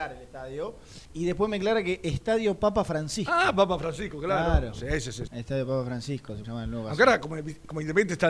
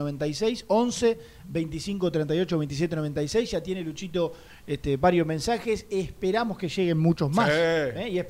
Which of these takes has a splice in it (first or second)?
first